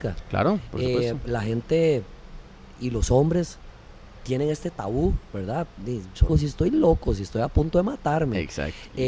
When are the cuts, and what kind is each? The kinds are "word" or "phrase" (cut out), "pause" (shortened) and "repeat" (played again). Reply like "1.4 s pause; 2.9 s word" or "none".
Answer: 6.3 s phrase